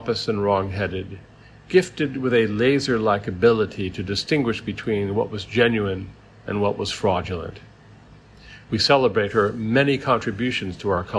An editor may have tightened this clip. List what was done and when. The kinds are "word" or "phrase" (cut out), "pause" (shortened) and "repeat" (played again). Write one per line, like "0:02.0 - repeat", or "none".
none